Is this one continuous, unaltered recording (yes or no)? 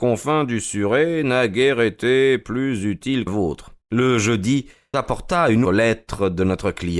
no